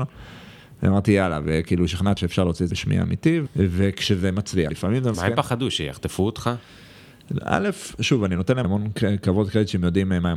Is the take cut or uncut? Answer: cut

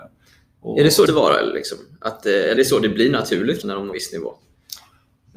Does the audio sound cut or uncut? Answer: cut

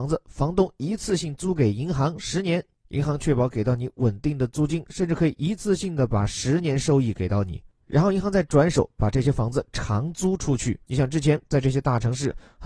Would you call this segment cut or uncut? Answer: cut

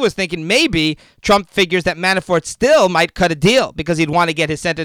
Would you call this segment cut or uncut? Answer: uncut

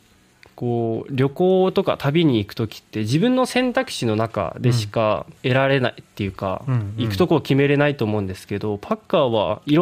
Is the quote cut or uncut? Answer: cut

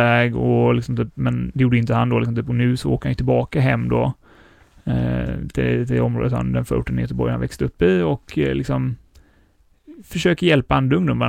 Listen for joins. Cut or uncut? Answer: uncut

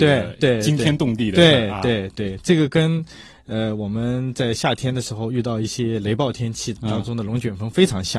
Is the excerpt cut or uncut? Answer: uncut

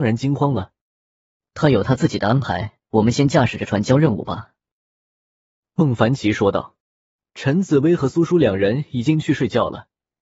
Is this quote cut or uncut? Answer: cut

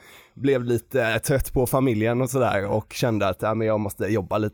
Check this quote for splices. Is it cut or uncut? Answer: uncut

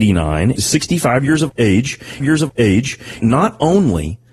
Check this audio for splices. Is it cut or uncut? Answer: cut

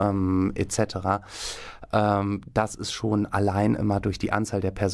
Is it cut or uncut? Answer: uncut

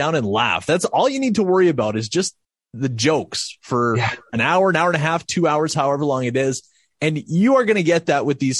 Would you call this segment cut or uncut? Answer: uncut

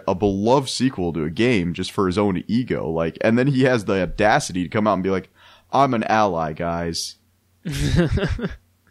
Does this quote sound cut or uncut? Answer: uncut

